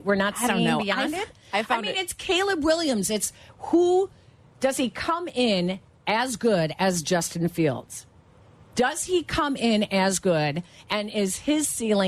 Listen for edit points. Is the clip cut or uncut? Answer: uncut